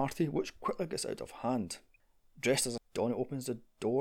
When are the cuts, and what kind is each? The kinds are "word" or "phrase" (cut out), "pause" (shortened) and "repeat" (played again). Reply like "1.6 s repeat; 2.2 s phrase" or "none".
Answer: 2.8 s word